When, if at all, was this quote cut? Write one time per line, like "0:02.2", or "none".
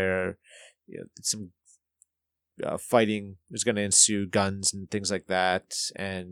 none